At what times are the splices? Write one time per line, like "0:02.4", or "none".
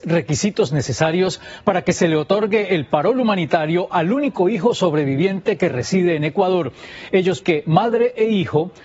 0:07.4